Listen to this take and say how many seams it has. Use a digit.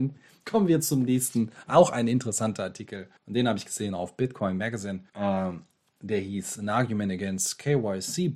2